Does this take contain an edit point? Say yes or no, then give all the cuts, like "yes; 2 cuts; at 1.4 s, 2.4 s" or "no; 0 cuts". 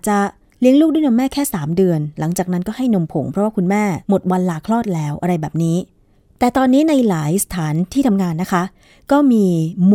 yes; 1 cut; at 4.0 s